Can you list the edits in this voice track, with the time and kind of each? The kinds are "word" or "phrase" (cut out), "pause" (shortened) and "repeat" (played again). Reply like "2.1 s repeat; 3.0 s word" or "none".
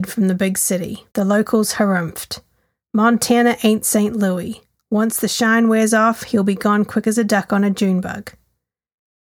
1.1 s pause